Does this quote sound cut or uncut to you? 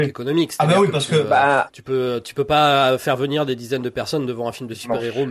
uncut